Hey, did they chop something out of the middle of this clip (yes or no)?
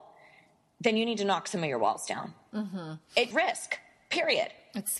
yes